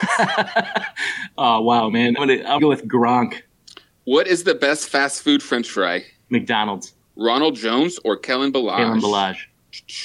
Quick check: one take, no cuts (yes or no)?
no